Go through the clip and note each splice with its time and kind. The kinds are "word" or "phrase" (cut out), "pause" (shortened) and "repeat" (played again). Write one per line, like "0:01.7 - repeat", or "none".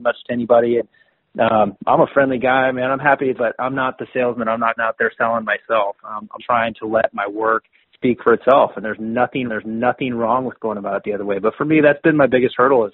0:01.8 - word
0:03.4 - phrase
0:04.8 - word
0:06.4 - word
0:07.8 - pause
0:09.5 - repeat